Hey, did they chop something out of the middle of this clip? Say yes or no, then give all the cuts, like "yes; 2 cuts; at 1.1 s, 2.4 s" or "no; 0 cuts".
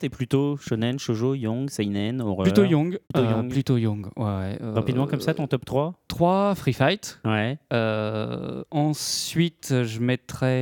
yes; 2 cuts; at 3.0 s, 6.1 s